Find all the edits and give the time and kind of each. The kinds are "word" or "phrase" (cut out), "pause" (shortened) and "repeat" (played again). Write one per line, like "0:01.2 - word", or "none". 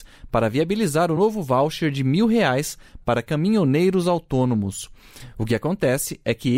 none